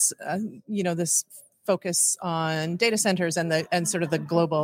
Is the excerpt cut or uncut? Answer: uncut